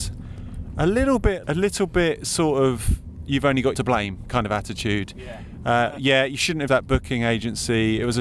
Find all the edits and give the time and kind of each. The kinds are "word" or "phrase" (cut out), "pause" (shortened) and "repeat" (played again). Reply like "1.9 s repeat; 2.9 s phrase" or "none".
1.4 s word; 3.7 s word; 6.7 s word

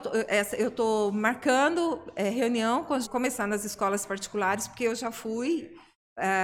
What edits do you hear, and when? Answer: 3.0 s word

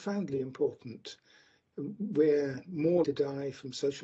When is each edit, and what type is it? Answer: 3.0 s word

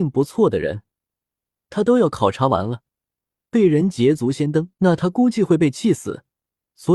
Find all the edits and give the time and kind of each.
4.7 s pause

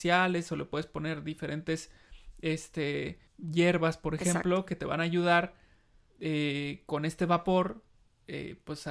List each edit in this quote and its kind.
3.3 s pause

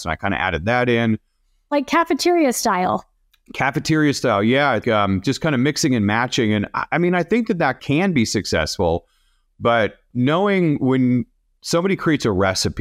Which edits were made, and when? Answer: 4.8 s word

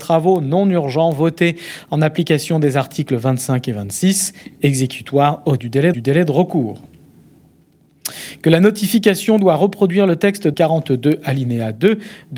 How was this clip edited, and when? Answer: 5.6 s word; 5.9 s repeat; 10.5 s word

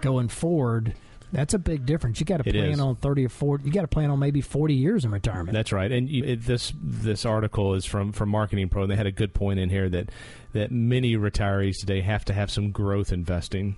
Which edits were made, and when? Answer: 6.2 s word

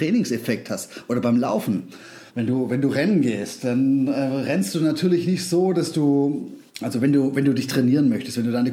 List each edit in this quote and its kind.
2.3 s pause; 6.7 s pause

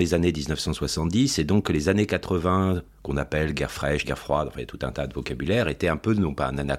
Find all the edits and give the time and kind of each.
4.0 s word

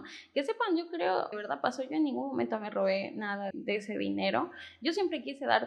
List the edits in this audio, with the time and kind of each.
1.3 s phrase; 3.5 s word

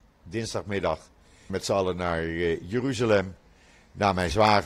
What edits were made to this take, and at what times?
1.5 s phrase

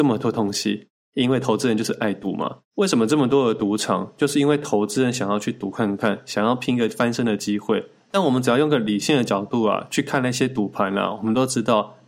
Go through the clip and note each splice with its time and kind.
2.6 s pause

